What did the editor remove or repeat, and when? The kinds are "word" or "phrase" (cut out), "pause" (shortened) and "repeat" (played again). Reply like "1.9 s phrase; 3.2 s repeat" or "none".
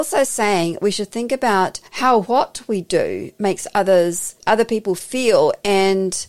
1.9 s pause; 4.4 s pause